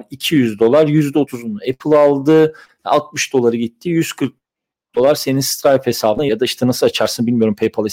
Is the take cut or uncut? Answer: uncut